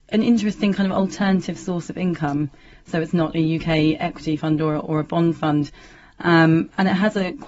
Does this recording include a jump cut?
no; 0 cuts

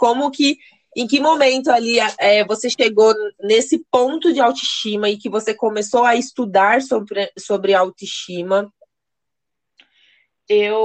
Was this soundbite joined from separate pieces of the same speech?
no; 0 cuts

